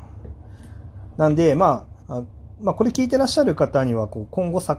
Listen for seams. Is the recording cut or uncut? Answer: cut